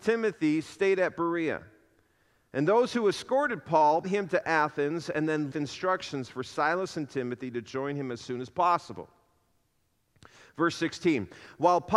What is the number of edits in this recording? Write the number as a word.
two